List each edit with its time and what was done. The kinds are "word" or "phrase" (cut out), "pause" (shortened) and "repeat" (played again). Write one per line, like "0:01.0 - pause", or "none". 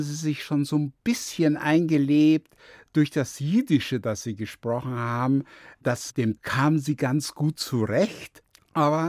0:06.4 - phrase